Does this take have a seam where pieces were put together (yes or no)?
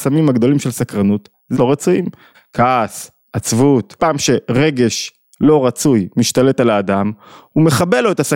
yes